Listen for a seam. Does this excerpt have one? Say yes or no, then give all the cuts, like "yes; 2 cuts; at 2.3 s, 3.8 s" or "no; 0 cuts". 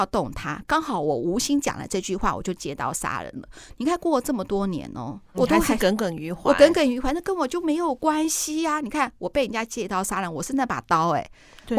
yes; 1 cut; at 5.3 s